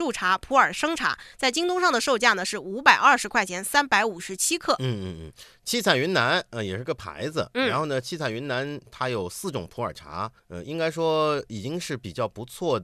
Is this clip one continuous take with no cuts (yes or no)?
no